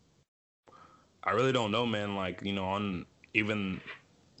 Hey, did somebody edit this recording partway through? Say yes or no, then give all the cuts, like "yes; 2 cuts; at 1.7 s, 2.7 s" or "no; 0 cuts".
no; 0 cuts